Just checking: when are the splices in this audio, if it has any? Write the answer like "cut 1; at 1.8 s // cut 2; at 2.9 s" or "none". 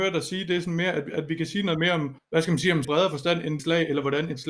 cut 1; at 2.2 s // cut 2; at 2.8 s // cut 3; at 3.6 s